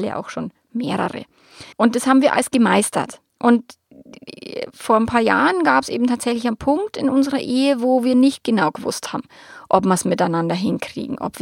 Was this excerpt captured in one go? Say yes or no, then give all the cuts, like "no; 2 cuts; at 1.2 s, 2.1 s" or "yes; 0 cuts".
no; 2 cuts; at 1.7 s, 3.3 s